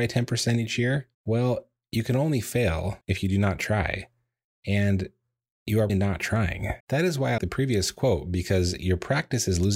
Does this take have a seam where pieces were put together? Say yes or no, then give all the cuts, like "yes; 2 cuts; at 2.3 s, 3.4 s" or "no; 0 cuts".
yes; 5 cuts; at 1.1 s, 3.0 s, 5.9 s, 6.8 s, 7.4 s